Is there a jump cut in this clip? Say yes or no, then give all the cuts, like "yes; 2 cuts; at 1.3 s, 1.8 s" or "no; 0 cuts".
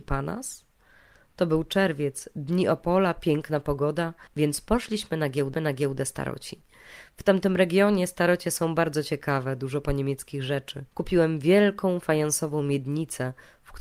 yes; 3 cuts; at 4.3 s, 5.5 s, 10.9 s